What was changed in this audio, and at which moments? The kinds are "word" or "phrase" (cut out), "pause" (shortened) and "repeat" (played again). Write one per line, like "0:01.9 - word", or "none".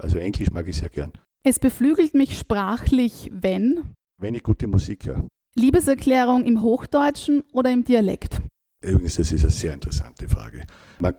none